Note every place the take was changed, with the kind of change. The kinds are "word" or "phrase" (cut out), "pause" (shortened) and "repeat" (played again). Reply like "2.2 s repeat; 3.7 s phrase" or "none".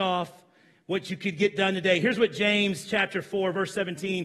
none